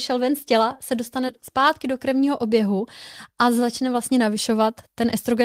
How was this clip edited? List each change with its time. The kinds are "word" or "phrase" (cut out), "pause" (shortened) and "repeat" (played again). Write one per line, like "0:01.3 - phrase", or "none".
none